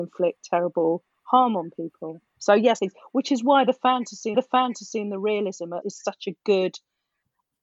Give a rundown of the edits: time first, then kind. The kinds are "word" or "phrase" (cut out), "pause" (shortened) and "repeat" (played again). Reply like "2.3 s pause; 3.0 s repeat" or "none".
2.3 s pause; 2.8 s phrase; 4.3 s repeat; 5.8 s word